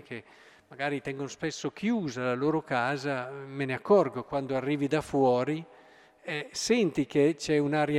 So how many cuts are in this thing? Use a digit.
0